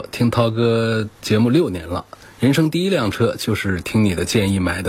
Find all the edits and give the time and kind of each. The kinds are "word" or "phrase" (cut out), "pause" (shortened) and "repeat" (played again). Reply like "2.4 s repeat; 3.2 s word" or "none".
1.1 s pause